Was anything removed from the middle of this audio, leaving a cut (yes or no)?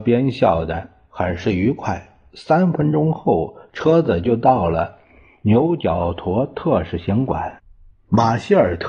no